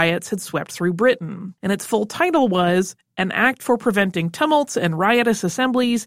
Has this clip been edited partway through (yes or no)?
yes